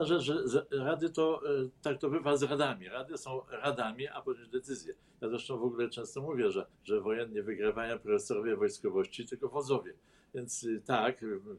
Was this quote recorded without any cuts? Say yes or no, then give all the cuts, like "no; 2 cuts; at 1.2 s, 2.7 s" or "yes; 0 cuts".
no; 2 cuts; at 4.2 s, 6.7 s